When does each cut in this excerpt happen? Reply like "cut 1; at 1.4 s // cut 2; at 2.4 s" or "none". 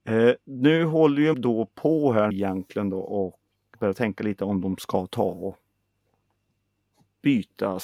cut 1; at 1.3 s // cut 2; at 2.3 s // cut 3; at 3.7 s